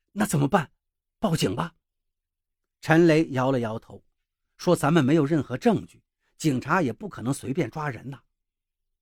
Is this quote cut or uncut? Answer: uncut